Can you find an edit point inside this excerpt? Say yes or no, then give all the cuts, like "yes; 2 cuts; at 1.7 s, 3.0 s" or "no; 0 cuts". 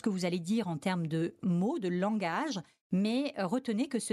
no; 0 cuts